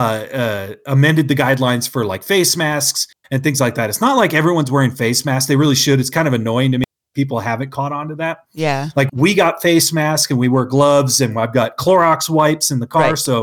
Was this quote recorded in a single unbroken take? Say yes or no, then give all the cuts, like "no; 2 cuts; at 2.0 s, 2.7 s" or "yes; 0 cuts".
no; 1 cut; at 9.1 s